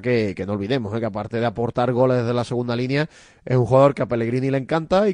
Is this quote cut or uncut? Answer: uncut